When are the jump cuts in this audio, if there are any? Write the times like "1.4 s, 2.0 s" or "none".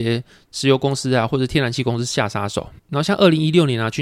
2.8 s